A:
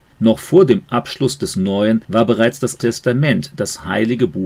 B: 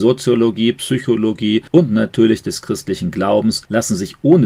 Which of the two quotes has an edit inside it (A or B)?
A